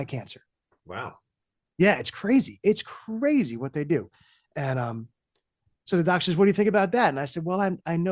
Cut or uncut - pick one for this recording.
uncut